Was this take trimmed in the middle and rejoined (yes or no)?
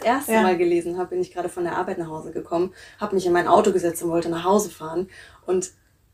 no